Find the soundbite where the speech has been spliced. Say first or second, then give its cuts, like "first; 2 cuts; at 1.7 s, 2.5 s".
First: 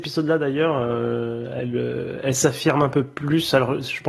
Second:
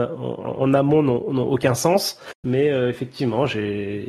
second; 1 cut; at 2.4 s